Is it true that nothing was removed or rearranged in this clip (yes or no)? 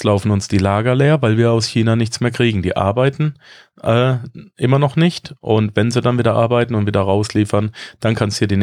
yes